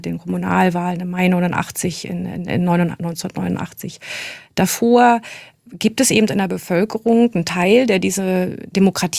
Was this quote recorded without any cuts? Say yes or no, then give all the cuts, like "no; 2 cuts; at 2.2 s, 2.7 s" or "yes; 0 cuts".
yes; 0 cuts